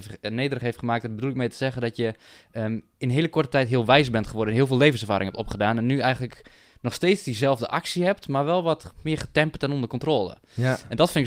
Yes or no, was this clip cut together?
no